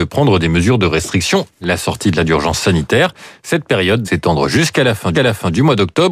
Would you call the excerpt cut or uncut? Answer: cut